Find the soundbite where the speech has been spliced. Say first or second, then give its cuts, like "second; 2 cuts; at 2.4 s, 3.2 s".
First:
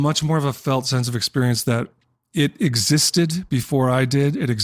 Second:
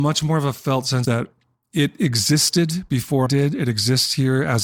second; 2 cuts; at 1.0 s, 3.3 s